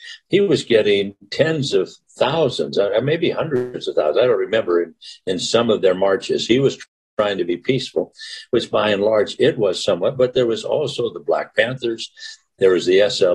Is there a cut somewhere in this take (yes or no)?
no